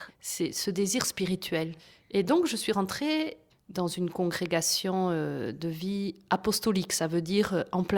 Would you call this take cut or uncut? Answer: uncut